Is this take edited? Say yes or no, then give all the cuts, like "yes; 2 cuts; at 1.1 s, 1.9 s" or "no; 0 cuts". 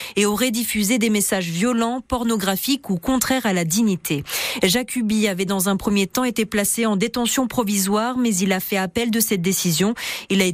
no; 0 cuts